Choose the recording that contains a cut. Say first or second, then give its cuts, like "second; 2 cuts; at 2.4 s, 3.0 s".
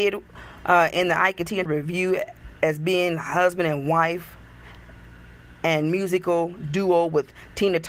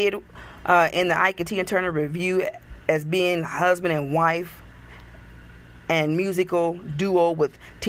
first; 1 cut; at 1.7 s